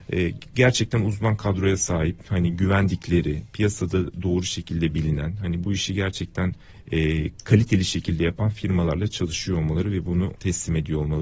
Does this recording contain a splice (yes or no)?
yes